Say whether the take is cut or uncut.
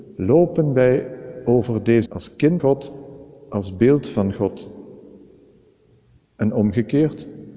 cut